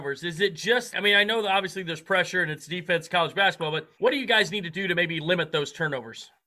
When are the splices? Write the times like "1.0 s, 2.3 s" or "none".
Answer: 0.9 s, 3.9 s